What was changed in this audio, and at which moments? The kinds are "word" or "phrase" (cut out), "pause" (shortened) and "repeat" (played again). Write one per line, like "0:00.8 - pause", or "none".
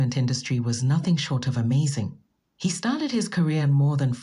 none